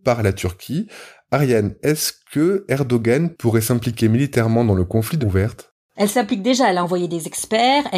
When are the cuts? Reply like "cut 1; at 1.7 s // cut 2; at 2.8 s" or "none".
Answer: cut 1; at 5.2 s